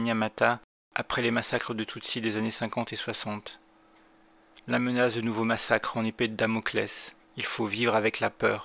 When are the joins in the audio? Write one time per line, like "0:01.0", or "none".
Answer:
0:07.2